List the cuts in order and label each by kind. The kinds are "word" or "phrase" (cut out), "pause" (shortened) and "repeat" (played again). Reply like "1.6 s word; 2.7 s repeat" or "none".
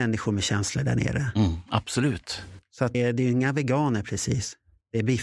2.9 s word